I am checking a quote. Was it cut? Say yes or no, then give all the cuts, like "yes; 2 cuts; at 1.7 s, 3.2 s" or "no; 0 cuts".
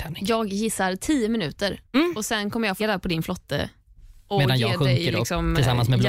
yes; 3 cuts; at 1.8 s, 2.8 s, 4.3 s